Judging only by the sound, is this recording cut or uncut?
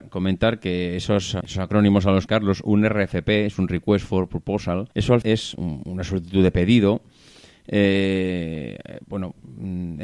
cut